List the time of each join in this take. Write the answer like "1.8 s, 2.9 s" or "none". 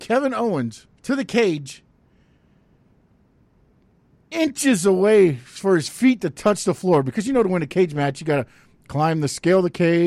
1.0 s